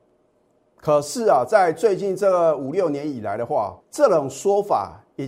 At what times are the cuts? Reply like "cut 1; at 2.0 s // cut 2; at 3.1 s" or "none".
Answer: cut 1; at 3.8 s